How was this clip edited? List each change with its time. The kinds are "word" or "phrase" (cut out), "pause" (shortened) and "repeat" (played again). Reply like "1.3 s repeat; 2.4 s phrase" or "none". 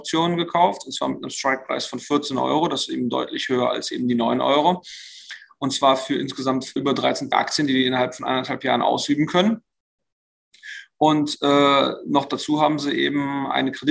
6.8 s word; 7.3 s phrase